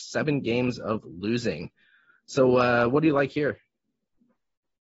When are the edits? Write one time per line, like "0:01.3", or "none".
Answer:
none